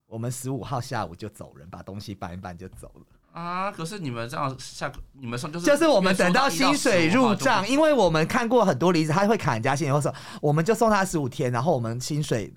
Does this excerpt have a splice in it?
yes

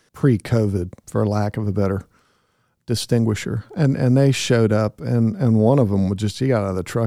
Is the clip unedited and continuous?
yes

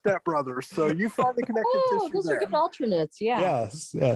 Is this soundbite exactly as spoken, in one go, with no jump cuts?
yes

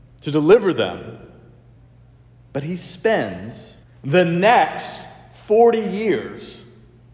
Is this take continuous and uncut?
no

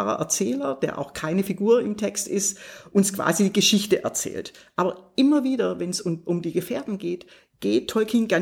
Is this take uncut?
yes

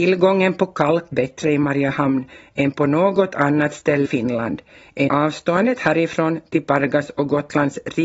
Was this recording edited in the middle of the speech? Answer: yes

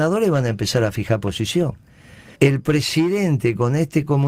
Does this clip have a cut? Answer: yes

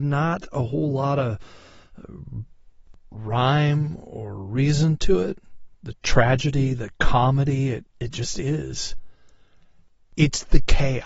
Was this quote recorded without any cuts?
no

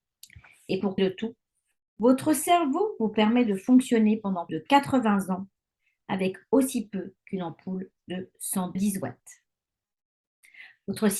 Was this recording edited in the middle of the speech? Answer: yes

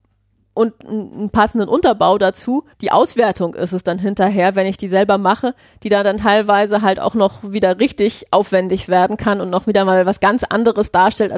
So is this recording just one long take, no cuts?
no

